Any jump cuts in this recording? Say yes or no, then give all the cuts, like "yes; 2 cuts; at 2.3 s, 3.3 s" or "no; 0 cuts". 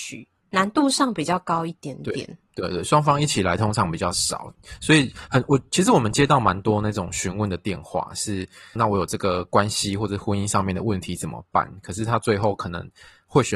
yes; 1 cut; at 8.8 s